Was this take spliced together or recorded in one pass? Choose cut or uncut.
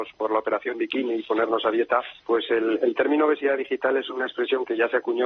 cut